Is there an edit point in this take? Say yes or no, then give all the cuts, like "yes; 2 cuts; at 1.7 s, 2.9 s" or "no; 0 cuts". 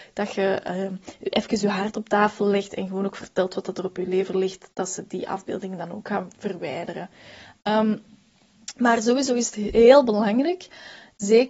no; 0 cuts